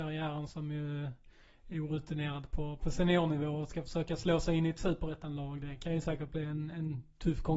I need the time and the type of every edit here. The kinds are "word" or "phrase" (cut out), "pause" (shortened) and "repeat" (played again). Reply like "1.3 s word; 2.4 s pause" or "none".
none

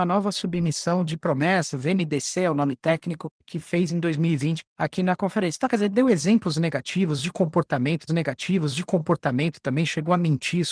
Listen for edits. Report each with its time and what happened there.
8.1 s repeat

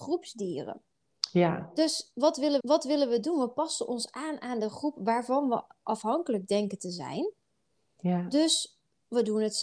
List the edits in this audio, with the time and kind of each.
2.6 s repeat

